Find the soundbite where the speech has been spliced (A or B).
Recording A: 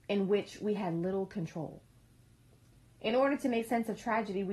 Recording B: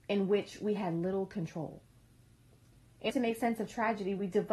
B